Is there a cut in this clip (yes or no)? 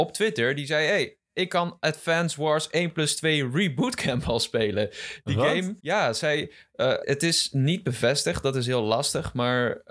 yes